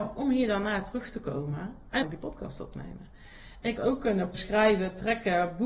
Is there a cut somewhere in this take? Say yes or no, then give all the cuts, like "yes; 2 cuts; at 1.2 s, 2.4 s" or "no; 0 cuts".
yes; 3 cuts; at 2.0 s, 3.8 s, 4.3 s